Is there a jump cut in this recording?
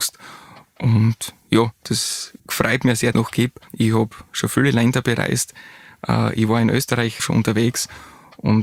yes; 4 cuts; at 2.4 s, 3.1 s, 3.7 s, 7.2 s

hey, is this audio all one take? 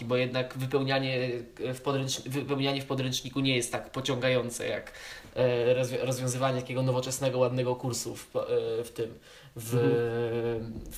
yes; 0 cuts

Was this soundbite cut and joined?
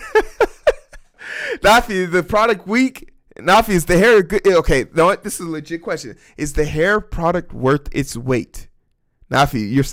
no; 0 cuts

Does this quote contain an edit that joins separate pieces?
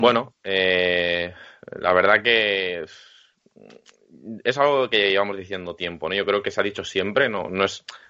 no; 0 cuts

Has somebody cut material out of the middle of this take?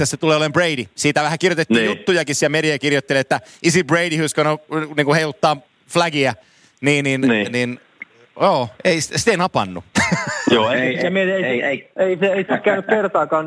no; 0 cuts

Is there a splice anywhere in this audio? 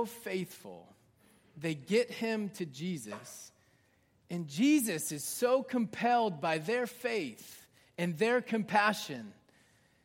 no; 0 cuts

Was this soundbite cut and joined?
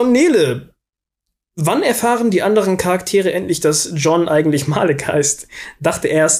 no; 0 cuts

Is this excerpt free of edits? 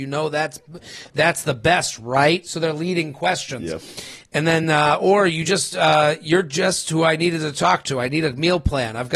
yes; 0 cuts

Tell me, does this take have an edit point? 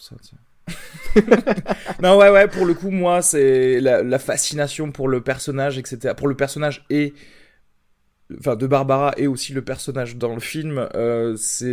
no; 0 cuts

